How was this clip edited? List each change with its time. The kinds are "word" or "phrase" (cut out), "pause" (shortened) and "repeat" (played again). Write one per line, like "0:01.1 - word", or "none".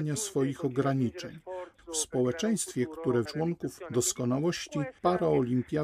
0:03.3 - phrase